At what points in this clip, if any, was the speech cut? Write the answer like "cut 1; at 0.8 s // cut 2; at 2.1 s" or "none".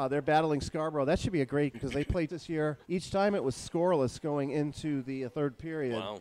cut 1; at 1.7 s // cut 2; at 2.3 s // cut 3; at 2.8 s